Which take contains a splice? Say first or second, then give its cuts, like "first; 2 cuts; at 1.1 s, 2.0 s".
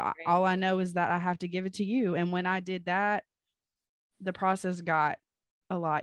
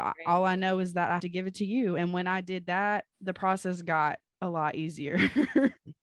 second; 3 cuts; at 1.2 s, 3.1 s, 4.3 s